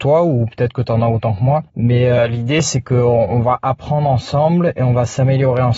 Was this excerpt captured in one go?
no; 1 cut; at 1.7 s

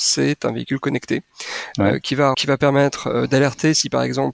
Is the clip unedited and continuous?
no; 1 cut; at 2.3 s

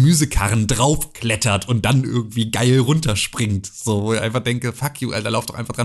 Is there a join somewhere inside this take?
no; 0 cuts

